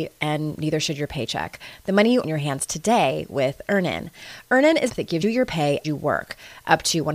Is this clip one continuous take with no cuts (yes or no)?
no